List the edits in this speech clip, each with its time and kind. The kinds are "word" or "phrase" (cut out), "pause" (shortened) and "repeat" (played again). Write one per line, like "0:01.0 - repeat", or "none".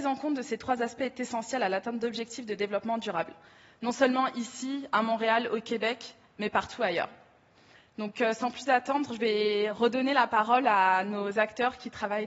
none